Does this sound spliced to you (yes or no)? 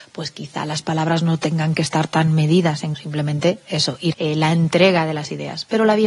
yes